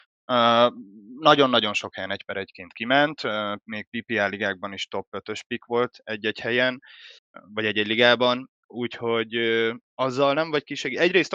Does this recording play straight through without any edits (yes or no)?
no